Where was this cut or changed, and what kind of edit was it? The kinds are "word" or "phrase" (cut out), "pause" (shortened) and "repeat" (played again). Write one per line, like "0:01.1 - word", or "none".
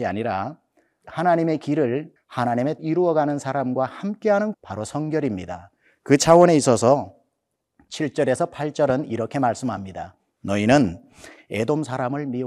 0:02.2 - word
0:02.8 - word
0:04.5 - word